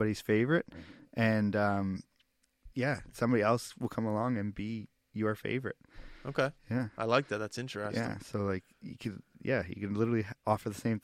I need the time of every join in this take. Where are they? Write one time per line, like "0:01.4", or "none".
0:02.7
0:06.2